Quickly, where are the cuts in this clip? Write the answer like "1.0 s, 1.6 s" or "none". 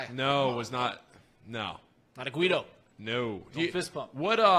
none